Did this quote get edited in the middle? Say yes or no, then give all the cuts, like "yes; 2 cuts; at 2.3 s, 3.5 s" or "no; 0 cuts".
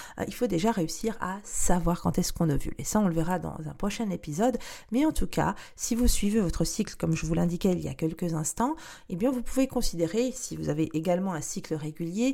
no; 0 cuts